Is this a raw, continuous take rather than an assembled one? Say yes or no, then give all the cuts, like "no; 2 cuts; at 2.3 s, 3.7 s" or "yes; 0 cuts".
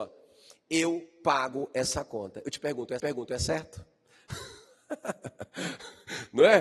no; 1 cut; at 3.0 s